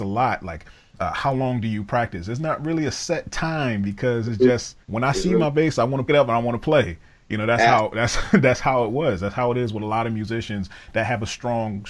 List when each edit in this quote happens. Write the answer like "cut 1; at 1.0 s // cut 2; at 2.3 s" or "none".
cut 1; at 4.8 s // cut 2; at 6.1 s

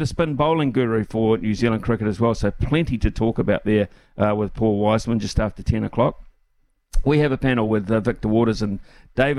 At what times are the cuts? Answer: none

